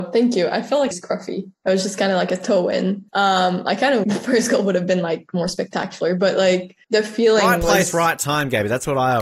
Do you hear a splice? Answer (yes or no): yes